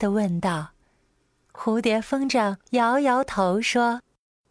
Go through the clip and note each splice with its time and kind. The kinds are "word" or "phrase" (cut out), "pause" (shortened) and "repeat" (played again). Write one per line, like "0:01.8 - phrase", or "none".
0:02.6 - pause